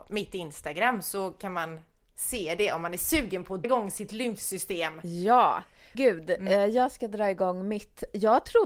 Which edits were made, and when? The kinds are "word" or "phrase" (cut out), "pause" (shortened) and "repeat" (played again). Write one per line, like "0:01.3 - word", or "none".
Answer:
0:03.6 - word
0:05.9 - word